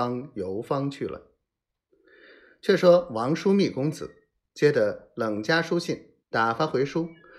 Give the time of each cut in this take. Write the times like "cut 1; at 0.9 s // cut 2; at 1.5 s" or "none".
cut 1; at 6.2 s